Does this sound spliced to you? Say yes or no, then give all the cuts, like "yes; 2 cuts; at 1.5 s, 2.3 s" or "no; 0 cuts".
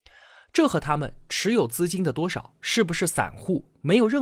no; 0 cuts